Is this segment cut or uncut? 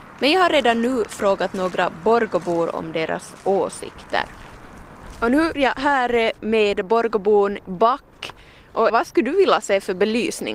cut